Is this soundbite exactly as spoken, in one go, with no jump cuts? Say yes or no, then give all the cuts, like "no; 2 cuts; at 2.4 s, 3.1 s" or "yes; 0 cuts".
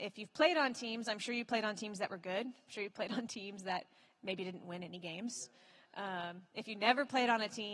yes; 0 cuts